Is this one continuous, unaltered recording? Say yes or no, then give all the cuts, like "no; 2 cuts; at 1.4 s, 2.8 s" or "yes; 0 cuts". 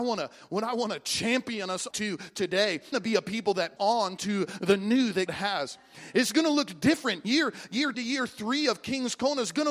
no; 5 cuts; at 1.9 s, 2.9 s, 3.8 s, 5.3 s, 7.9 s